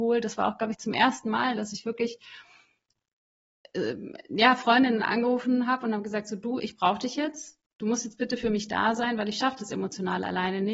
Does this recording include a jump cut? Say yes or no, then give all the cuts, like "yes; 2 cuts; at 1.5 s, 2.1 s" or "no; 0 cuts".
no; 0 cuts